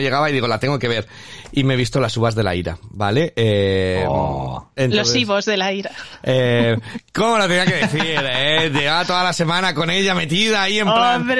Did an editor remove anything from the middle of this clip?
no; 0 cuts

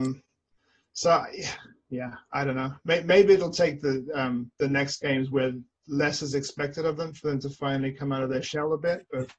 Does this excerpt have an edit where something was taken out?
no; 0 cuts

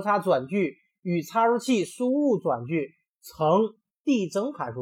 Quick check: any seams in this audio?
no; 0 cuts

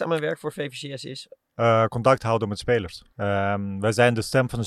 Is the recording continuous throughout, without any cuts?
no; 2 cuts; at 1.4 s, 3.1 s

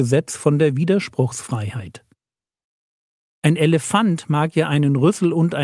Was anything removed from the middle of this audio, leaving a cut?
no; 0 cuts

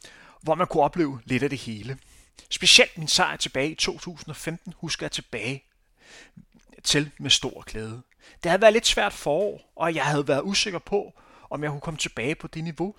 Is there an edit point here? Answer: no; 0 cuts

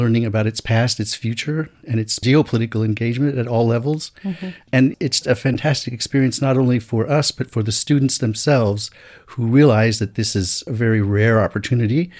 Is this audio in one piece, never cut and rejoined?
no; 1 cut; at 5.2 s

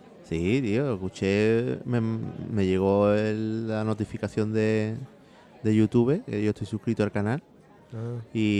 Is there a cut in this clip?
no; 0 cuts

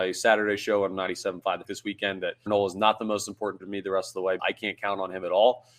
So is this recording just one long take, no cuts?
no; 4 cuts; at 1.6 s, 2.5 s, 3.6 s, 4.4 s

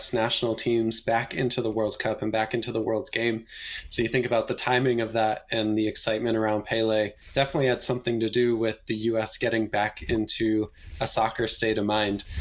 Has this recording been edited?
yes; 1 cut; at 7.2 s

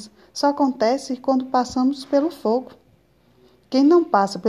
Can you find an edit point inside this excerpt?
no; 0 cuts

